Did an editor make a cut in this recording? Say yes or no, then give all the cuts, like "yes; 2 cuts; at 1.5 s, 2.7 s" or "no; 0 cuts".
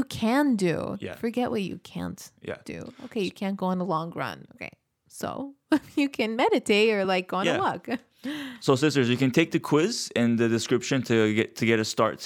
no; 0 cuts